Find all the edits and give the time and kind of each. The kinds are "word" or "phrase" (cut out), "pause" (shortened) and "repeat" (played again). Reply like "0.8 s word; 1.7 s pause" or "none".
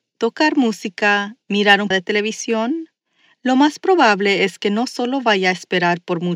1.9 s word